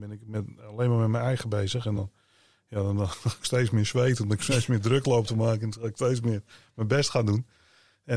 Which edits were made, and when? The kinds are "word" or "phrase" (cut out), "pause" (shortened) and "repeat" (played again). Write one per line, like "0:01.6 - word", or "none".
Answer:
none